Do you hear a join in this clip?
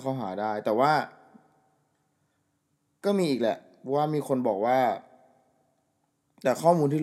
no; 0 cuts

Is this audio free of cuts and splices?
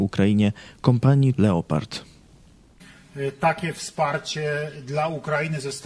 no; 1 cut; at 1.4 s

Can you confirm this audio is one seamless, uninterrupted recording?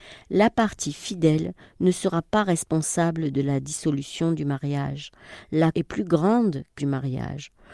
no; 2 cuts; at 5.7 s, 6.8 s

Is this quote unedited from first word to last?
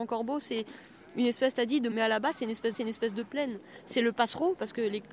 no; 2 cuts; at 1.9 s, 2.7 s

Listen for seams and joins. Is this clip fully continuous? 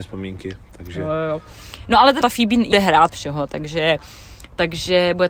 no; 3 cuts; at 2.2 s, 2.7 s, 3.1 s

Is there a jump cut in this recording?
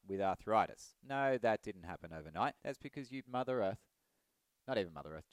yes; 3 cuts; at 1.0 s, 2.6 s, 3.2 s

